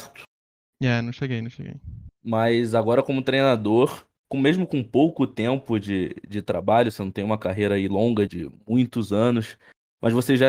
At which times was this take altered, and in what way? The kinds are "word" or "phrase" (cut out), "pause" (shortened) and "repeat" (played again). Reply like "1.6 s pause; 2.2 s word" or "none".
2.1 s pause; 8.3 s word

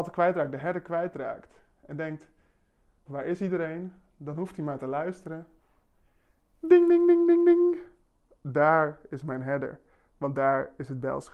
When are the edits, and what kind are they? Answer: 3.1 s word

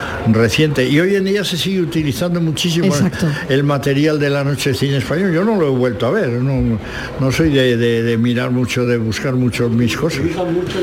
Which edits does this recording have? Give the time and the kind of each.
none

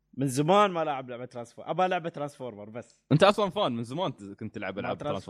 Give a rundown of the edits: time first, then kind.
none

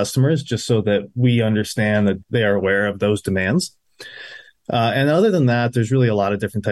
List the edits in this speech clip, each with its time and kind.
2.2 s word

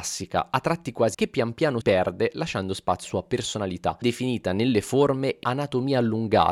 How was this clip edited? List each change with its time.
1.1 s word; 1.8 s word; 3.0 s word; 4.0 s word; 5.4 s word

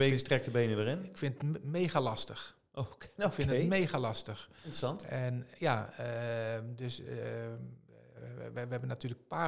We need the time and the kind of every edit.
none

